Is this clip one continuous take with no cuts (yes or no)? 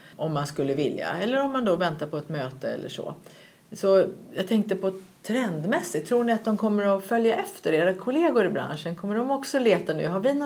yes